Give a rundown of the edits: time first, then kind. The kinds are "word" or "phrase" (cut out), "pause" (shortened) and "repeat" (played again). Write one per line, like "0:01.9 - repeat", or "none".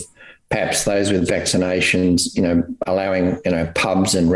none